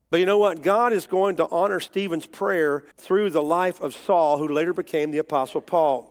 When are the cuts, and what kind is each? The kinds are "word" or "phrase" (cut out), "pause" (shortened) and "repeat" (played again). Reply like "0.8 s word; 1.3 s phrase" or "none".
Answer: 2.9 s pause